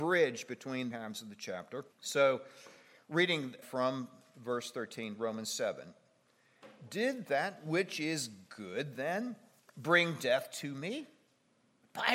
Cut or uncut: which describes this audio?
cut